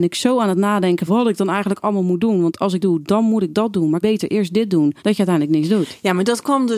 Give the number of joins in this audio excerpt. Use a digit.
4